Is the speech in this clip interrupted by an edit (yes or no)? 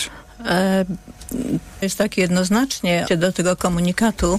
yes